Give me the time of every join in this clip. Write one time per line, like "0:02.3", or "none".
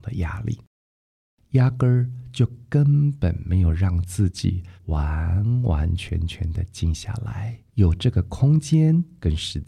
0:04.8
0:07.7